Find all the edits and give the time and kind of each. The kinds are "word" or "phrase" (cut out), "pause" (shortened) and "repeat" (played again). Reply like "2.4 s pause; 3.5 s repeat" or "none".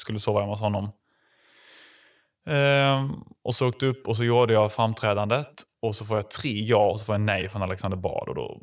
none